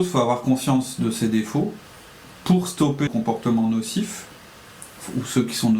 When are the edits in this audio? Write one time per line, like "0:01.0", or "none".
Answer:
0:03.1